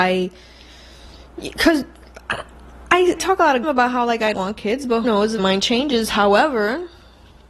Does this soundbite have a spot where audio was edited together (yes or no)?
yes